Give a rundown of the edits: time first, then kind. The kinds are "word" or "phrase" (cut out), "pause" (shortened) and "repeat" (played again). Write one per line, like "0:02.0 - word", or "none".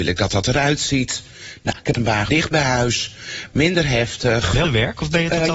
0:01.9 - word
0:02.3 - word
0:04.6 - word

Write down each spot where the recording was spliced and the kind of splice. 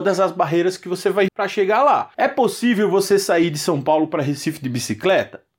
0:01.3 - word
0:02.1 - pause

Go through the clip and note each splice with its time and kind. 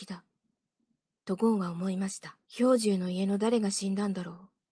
0:02.5 - pause

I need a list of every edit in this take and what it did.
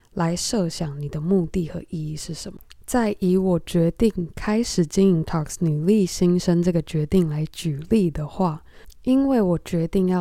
0:05.2 - phrase

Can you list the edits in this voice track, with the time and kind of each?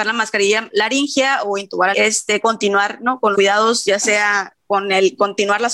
0:01.9 - phrase
0:03.3 - word

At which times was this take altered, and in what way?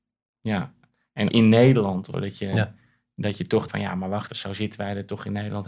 0:01.3 - word
0:02.1 - word
0:03.7 - word
0:04.3 - word

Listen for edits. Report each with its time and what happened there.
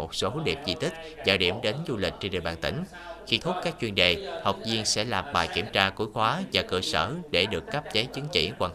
0:03.4 - word

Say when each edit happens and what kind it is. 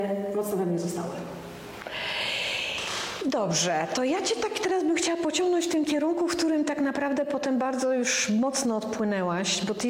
none

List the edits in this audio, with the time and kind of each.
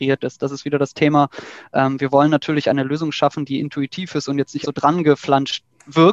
0:04.6 - word

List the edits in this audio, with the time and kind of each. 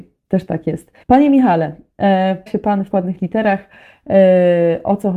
0:01.0 - pause
0:02.5 - word
0:02.9 - word

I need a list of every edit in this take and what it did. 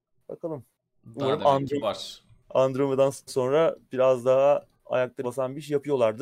0:01.8 - word
0:03.3 - word
0:03.8 - pause
0:05.2 - word

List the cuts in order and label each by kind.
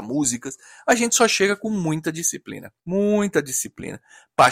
0:02.8 - pause

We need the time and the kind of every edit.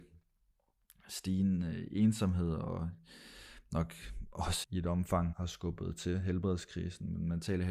0:04.6 - word
0:05.3 - word

